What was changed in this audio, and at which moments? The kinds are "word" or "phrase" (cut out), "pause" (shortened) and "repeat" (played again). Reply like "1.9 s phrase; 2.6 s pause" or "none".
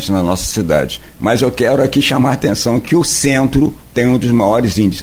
3.8 s word